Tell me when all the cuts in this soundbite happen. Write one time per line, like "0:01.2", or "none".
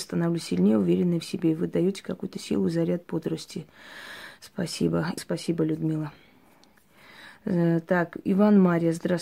0:05.2